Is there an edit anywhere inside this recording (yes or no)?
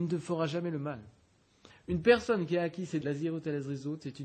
yes